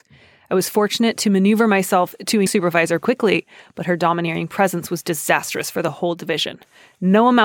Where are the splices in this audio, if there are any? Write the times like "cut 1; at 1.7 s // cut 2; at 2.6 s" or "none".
cut 1; at 2.5 s // cut 2; at 3.0 s